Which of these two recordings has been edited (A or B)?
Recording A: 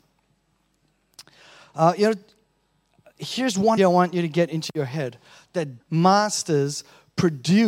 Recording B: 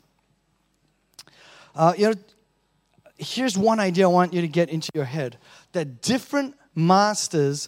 A